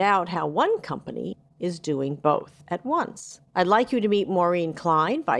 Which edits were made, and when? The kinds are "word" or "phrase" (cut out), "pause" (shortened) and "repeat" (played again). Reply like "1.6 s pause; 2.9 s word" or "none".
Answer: 3.5 s pause